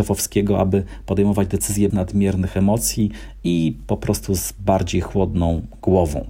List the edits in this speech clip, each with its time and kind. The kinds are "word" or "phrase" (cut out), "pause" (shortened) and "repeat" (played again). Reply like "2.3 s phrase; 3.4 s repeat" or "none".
1.9 s word